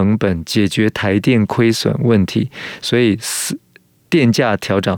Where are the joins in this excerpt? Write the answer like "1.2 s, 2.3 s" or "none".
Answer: none

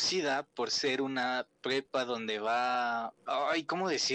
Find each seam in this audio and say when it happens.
3.2 s

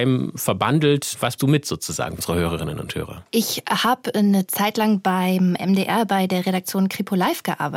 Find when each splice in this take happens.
1.4 s, 2.2 s

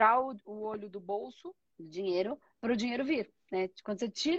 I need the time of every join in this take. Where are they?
1.7 s

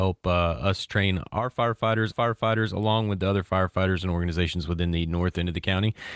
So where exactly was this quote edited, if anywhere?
2.1 s

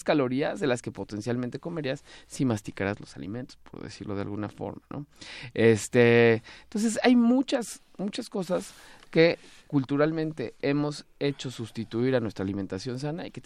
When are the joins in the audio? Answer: none

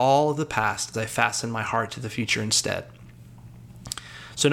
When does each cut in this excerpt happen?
0.9 s

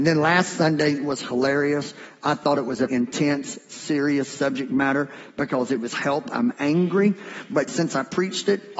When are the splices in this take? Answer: 2.9 s, 7.7 s

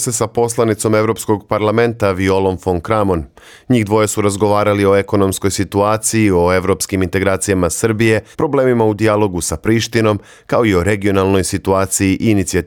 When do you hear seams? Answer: 8.3 s

